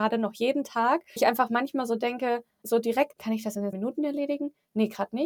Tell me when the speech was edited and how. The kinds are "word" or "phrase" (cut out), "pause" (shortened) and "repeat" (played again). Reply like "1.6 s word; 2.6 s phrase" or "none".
1.2 s word; 2.6 s word; 3.1 s word; 3.7 s word

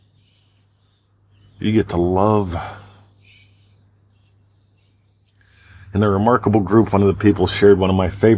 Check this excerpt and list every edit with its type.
none

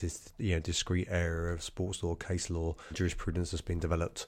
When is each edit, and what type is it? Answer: 2.9 s word

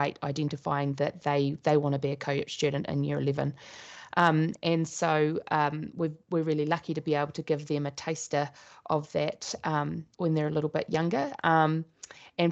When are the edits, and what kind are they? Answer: 10.1 s pause

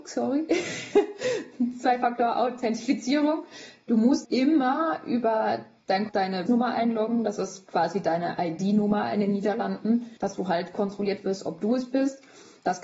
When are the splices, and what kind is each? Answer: 4.2 s word; 6.1 s phrase; 6.5 s word; 10.2 s pause

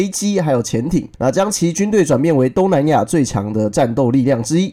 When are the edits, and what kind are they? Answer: 1.1 s pause

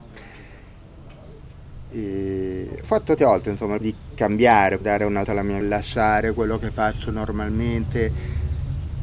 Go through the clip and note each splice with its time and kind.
2.8 s word; 3.2 s word; 3.8 s word; 4.8 s word; 5.2 s word; 5.6 s word

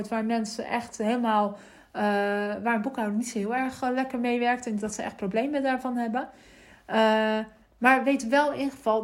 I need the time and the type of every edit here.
4.8 s word; 7.6 s pause

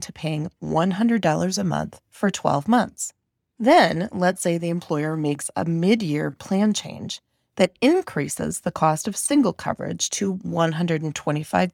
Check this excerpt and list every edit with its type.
2.0 s pause

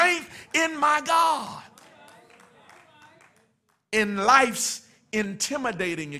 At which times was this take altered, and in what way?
none

